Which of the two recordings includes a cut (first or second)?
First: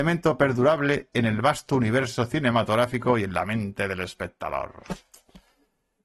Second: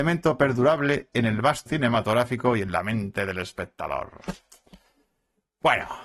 second